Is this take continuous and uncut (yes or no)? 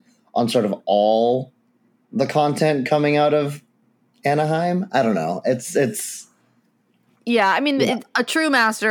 yes